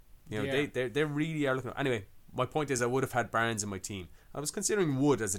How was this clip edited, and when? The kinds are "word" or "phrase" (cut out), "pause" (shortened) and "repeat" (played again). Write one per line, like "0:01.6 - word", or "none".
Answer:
none

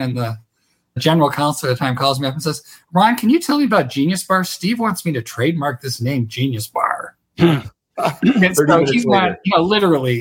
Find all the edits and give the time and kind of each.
none

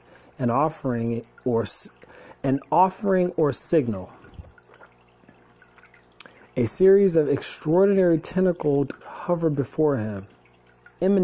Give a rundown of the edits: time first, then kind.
0:09.0 - word

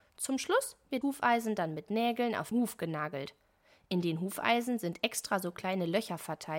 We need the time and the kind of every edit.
0:01.0 - word
0:02.5 - word

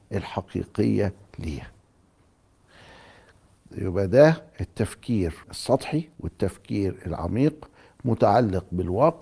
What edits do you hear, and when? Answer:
0:05.4 - pause

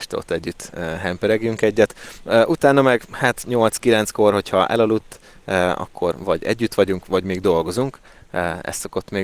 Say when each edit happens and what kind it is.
none

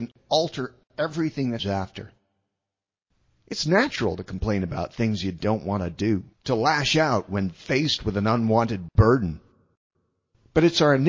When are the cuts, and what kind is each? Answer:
0:01.6 - word
0:06.3 - pause

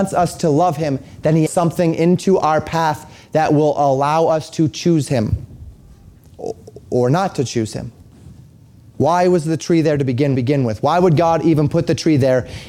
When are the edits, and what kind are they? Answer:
0:01.5 - phrase
0:10.3 - repeat

